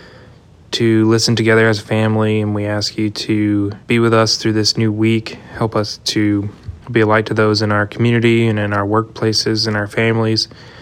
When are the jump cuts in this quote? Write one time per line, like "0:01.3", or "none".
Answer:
0:03.8
0:06.8